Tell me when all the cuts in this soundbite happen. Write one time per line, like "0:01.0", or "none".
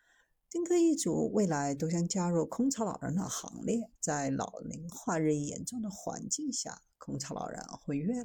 0:04.0